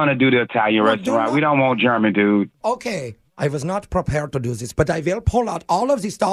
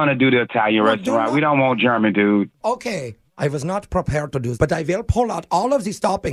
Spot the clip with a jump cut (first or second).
second